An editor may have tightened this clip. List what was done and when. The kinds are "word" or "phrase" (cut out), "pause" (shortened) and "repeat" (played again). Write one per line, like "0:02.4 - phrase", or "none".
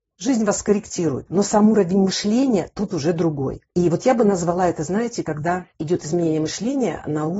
0:03.7 - pause
0:05.7 - pause